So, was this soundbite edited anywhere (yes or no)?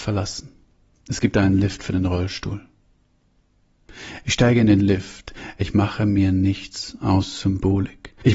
yes